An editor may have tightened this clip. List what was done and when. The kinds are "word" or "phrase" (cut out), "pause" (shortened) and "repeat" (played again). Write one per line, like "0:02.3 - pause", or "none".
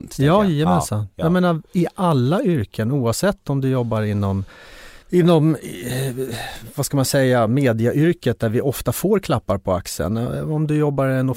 0:01.7 - pause
0:05.0 - pause